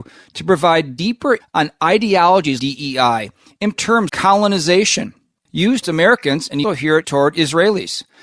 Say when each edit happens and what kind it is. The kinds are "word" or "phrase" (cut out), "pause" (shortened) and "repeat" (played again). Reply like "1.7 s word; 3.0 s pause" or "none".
1.4 s word; 2.6 s word; 3.8 s word; 4.1 s word; 5.8 s word; 6.6 s word; 7.0 s word